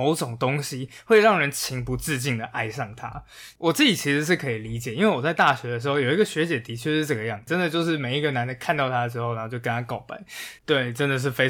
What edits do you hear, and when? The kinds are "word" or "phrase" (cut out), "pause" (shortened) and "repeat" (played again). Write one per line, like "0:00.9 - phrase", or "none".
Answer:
0:10.6 - pause